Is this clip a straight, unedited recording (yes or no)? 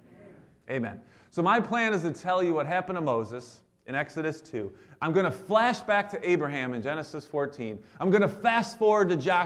yes